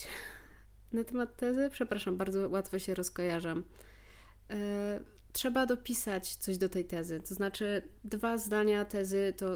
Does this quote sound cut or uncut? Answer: uncut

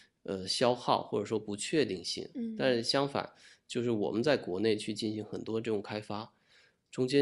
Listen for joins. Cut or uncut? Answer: uncut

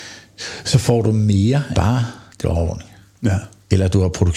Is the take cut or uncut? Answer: cut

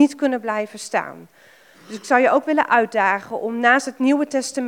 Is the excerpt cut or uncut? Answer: uncut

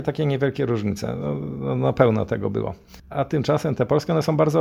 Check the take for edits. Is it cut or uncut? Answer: cut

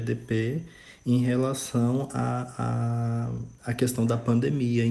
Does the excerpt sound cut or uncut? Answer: cut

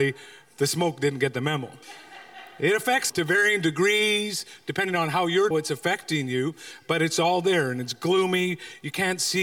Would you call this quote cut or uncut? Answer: cut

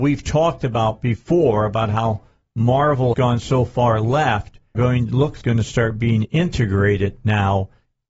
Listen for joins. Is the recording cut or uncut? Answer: cut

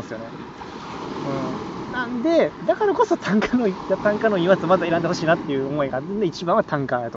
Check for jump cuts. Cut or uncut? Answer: uncut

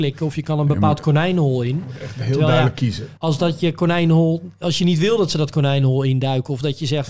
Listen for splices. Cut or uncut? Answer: cut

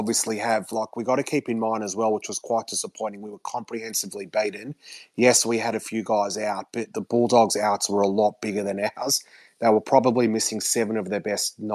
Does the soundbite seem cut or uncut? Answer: uncut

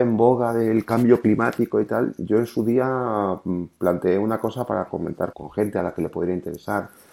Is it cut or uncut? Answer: cut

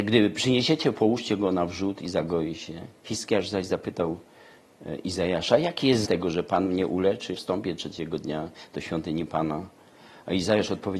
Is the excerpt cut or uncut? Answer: cut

